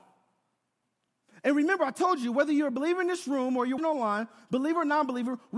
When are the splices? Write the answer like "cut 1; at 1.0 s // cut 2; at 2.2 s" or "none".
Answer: cut 1; at 3.8 s